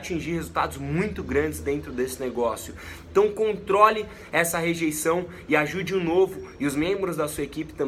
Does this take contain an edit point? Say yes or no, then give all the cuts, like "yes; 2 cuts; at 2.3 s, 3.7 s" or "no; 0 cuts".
no; 0 cuts